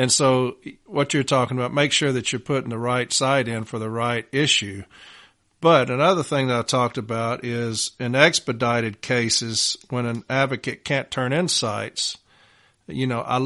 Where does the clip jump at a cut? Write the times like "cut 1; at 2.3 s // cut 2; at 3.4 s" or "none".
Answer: none

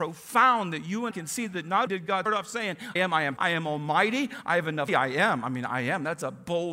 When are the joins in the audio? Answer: cut 1; at 1.1 s // cut 2; at 1.9 s // cut 3; at 2.3 s // cut 4; at 3.0 s // cut 5; at 3.4 s // cut 6; at 4.9 s

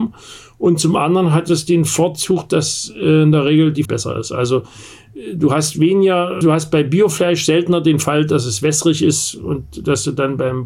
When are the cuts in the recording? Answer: cut 1; at 3.8 s // cut 2; at 6.4 s

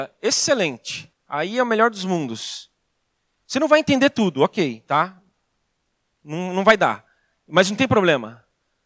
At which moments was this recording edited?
cut 1; at 1.1 s

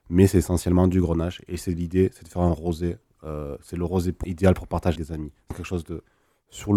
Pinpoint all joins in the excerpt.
cut 1; at 4.2 s // cut 2; at 5.0 s // cut 3; at 5.5 s

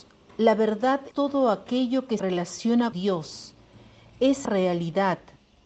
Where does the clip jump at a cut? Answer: cut 1; at 1.1 s // cut 2; at 2.2 s // cut 3; at 2.9 s // cut 4; at 4.4 s

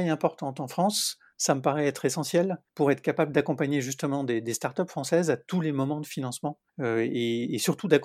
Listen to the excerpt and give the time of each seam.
cut 1; at 2.7 s // cut 2; at 6.7 s

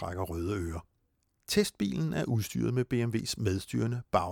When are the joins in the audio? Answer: none

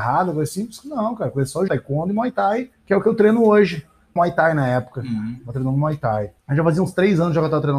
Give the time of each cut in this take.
cut 1; at 1.7 s // cut 2; at 2.7 s // cut 3; at 4.2 s // cut 4; at 6.4 s

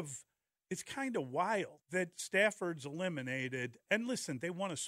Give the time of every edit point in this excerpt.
cut 1; at 1.8 s

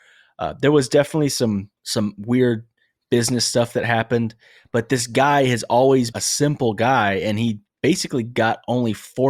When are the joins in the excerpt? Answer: cut 1; at 1.8 s // cut 2; at 6.1 s

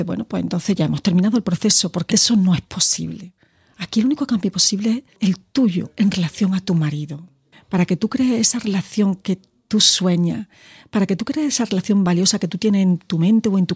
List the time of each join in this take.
cut 1; at 2.1 s // cut 2; at 5.1 s

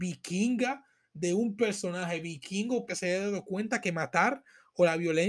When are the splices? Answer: cut 1; at 2.9 s

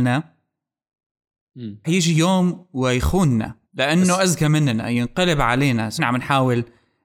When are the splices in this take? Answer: cut 1; at 1.8 s // cut 2; at 3.6 s // cut 3; at 6.0 s

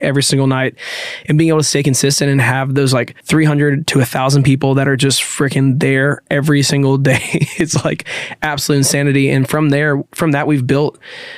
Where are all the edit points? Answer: cut 1; at 3.2 s

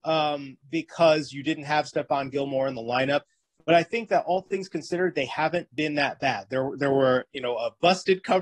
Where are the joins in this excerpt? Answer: none

